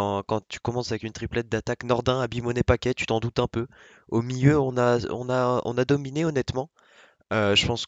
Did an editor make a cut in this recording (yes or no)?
no